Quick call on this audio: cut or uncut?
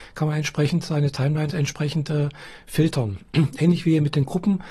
cut